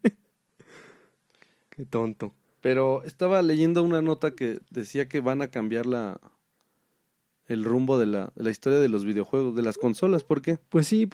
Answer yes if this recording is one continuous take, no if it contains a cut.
yes